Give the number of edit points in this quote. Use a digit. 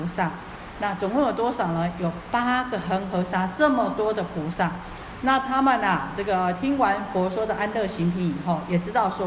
0